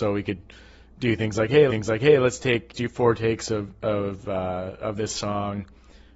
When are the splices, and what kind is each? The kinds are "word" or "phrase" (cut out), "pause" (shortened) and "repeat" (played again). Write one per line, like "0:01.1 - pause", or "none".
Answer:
0:01.7 - repeat
0:02.7 - phrase